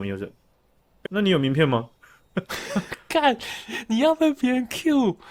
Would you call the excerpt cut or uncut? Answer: cut